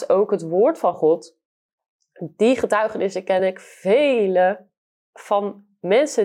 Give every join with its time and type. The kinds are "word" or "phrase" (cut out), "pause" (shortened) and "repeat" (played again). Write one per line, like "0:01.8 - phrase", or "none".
none